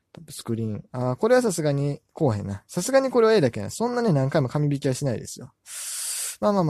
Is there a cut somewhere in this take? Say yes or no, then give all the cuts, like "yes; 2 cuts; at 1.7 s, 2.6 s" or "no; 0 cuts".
yes; 1 cut; at 2.1 s